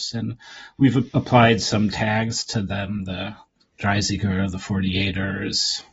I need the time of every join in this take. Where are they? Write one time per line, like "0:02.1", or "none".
0:01.1
0:03.6